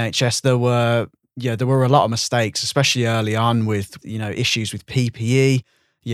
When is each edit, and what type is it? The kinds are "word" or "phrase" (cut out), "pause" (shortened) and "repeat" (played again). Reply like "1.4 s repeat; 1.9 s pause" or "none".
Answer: none